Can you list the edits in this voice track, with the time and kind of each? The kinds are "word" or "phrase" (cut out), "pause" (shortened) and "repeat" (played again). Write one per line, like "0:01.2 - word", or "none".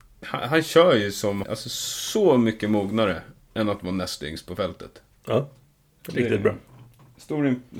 0:01.4 - word